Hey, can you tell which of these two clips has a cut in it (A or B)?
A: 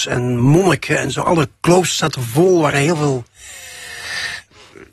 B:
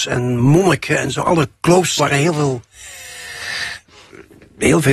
B